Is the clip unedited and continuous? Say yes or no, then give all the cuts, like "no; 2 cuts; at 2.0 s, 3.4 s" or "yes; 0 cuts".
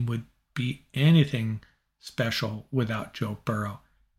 yes; 0 cuts